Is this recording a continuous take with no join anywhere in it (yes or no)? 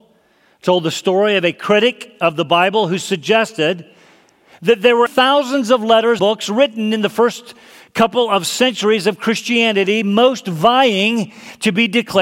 no